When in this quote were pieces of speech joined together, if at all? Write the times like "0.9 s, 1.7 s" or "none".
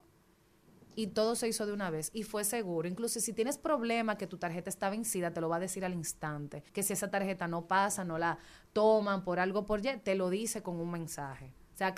6.7 s